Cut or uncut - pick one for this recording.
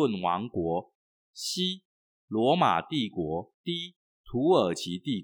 cut